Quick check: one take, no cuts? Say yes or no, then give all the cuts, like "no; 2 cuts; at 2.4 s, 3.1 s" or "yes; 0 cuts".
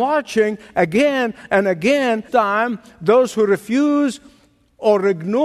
no; 1 cut; at 2.3 s